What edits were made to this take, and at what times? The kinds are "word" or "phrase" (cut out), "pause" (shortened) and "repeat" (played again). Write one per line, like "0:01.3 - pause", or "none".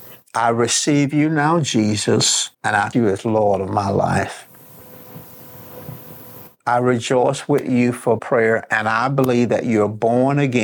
0:02.5 - pause
0:02.9 - word
0:08.2 - phrase

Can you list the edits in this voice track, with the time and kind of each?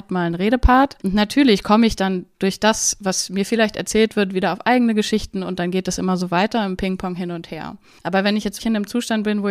0:01.0 - pause
0:08.6 - word

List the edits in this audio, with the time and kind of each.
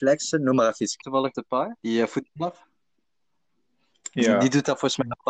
0:01.0 - word
0:01.3 - word
0:01.8 - pause

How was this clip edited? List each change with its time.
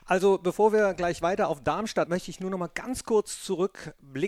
0:02.1 - word

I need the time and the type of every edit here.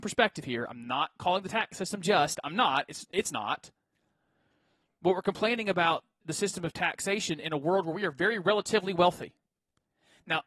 0:06.2 - word

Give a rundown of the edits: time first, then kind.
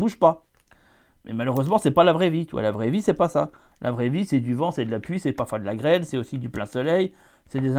none

